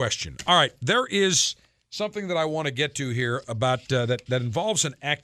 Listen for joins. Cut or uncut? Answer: uncut